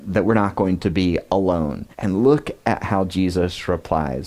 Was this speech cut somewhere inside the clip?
yes; 1 cut; at 1.9 s

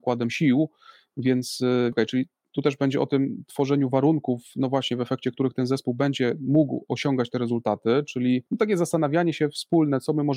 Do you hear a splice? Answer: yes; 2 cuts; at 1.9 s, 8.5 s

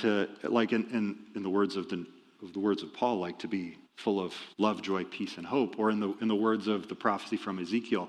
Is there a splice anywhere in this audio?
yes; 3 cuts; at 2.4 s, 3.8 s, 4.5 s

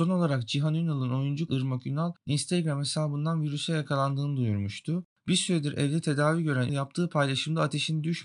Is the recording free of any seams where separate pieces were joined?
no; 2 cuts; at 1.5 s, 6.7 s

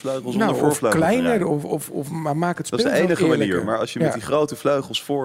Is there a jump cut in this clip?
no; 0 cuts

